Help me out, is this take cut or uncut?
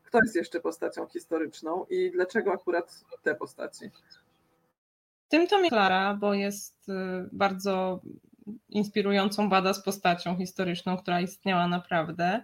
cut